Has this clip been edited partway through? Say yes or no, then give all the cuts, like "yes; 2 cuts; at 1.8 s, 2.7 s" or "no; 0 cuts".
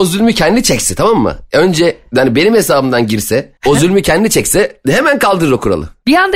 yes; 1 cut; at 3.6 s